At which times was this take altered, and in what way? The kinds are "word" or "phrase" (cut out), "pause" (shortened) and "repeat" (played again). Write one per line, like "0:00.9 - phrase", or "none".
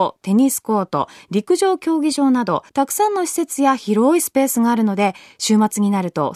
0:02.7 - pause